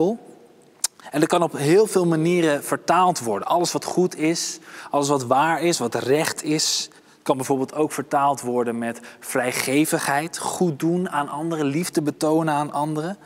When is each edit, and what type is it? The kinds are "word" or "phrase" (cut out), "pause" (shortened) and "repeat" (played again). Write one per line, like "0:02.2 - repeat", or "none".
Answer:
0:07.0 - pause